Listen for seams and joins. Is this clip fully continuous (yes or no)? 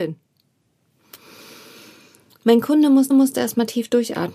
no